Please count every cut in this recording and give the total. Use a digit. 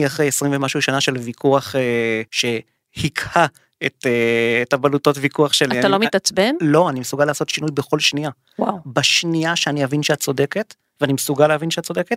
1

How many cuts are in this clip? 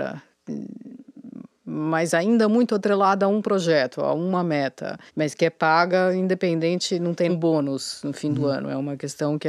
2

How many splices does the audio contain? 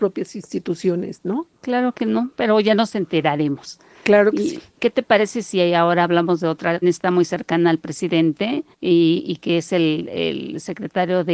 2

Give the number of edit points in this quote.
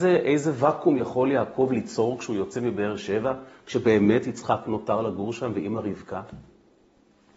0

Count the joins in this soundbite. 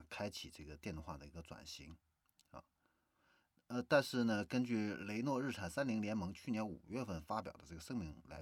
0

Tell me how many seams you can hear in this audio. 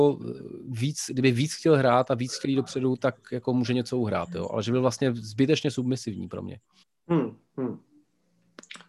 1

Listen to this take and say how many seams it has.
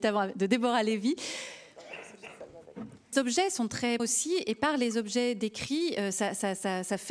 2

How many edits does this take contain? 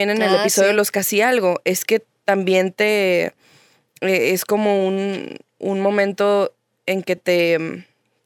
0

